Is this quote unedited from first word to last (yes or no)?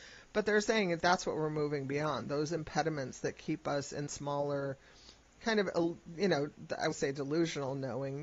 no